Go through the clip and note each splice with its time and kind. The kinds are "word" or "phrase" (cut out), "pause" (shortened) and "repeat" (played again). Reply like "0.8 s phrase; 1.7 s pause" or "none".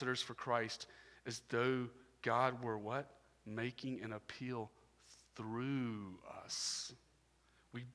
none

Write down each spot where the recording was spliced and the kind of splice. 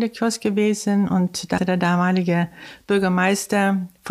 1.6 s word

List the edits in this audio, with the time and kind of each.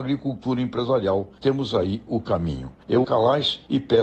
3.0 s phrase

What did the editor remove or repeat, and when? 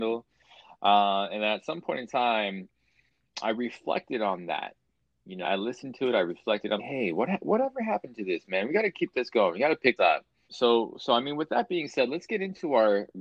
5.4 s word; 6.8 s word; 10.0 s word; 10.5 s word

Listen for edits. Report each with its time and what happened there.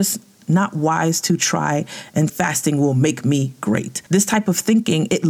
2.3 s word; 4.1 s pause

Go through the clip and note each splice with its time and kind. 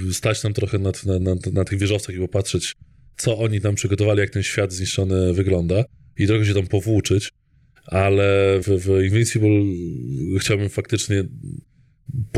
1.2 s word; 8.6 s word

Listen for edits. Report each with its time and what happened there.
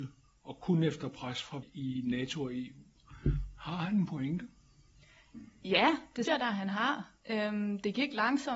1.6 s word; 6.3 s word

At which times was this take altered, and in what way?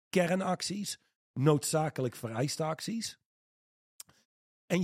none

